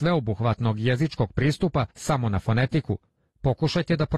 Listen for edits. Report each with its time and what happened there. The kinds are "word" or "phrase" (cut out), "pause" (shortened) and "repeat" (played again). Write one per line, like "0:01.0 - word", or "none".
0:01.9 - pause